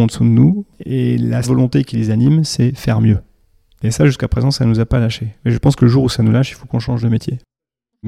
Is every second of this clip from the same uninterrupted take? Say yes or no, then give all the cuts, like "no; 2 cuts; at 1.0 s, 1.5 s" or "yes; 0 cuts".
no; 1 cut; at 1.4 s